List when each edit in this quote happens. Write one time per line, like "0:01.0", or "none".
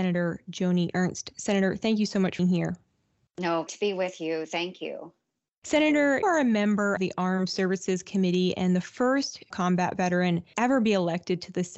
0:02.4
0:03.7
0:06.2
0:07.0
0:09.5
0:10.5